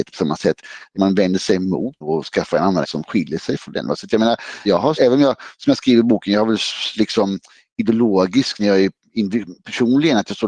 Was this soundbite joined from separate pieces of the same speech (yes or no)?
yes